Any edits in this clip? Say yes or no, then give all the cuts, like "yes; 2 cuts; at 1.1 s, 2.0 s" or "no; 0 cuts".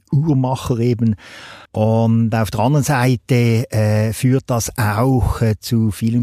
yes; 1 cut; at 1.7 s